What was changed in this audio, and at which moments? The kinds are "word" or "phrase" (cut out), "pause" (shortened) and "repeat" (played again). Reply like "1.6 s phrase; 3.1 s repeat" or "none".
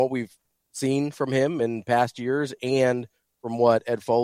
none